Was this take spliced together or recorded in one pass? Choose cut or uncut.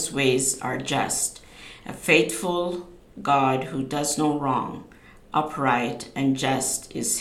uncut